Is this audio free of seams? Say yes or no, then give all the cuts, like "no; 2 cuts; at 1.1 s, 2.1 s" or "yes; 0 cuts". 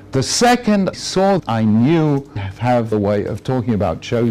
no; 4 cuts; at 0.9 s, 1.4 s, 2.4 s, 2.9 s